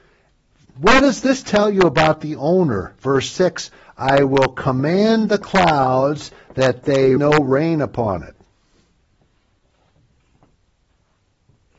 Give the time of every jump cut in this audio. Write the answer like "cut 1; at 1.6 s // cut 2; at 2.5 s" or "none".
cut 1; at 7.2 s